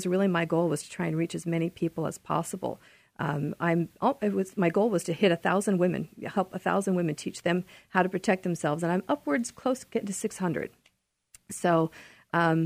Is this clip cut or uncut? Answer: uncut